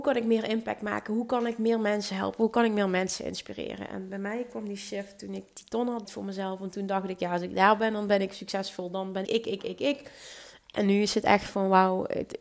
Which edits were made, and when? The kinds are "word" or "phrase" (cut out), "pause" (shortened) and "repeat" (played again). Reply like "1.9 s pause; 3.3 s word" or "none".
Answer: 6.0 s word; 9.2 s word